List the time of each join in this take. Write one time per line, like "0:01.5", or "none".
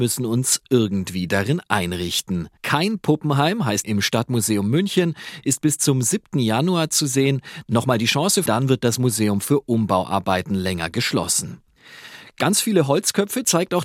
0:02.6
0:03.8
0:08.5